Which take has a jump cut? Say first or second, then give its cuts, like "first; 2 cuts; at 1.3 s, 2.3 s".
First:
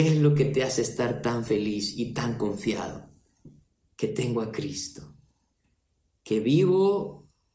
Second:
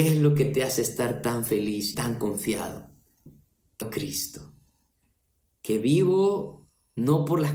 second; 2 cuts; at 1.9 s, 3.8 s